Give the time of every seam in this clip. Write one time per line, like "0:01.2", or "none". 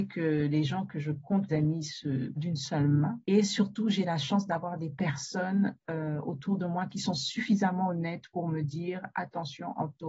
0:01.5
0:02.4
0:03.2